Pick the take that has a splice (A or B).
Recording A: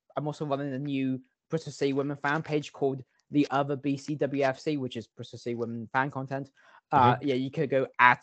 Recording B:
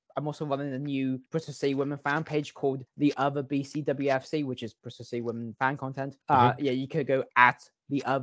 B